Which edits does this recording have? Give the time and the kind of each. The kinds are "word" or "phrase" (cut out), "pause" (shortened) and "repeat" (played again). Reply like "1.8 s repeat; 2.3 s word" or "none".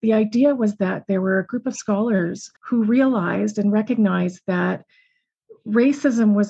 2.6 s pause